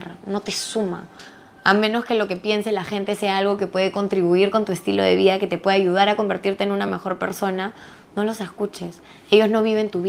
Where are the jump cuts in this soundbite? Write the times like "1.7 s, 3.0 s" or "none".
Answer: none